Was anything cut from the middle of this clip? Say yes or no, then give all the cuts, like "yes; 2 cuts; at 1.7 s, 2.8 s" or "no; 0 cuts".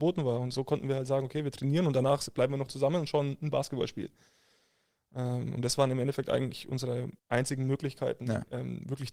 yes; 1 cut; at 7.2 s